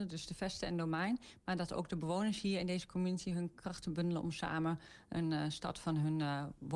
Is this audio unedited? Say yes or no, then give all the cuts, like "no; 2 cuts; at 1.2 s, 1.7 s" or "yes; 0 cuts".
yes; 0 cuts